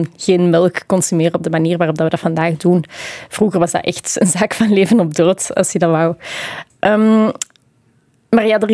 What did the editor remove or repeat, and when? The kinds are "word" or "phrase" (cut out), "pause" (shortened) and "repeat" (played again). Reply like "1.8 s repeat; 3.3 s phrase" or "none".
none